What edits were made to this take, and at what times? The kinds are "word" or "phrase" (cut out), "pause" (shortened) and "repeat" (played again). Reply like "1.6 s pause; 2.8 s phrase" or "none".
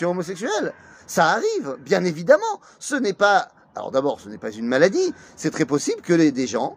none